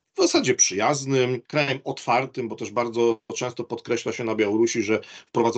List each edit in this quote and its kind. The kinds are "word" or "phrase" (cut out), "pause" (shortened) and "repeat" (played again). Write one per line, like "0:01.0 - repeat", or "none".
0:01.5 - pause

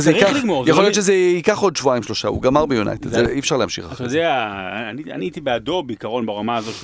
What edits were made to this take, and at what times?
none

